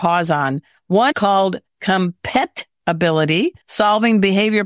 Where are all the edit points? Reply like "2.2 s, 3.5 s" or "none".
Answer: 1.1 s, 3.6 s